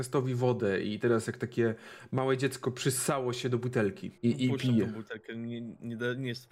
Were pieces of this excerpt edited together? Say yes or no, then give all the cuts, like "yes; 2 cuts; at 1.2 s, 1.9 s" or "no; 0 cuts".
yes; 1 cut; at 4.2 s